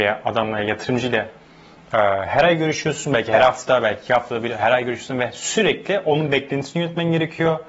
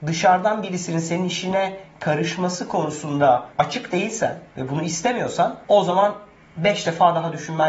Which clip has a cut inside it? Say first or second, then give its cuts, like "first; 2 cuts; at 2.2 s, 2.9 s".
second; 3 cuts; at 3.5 s, 4.5 s, 5.6 s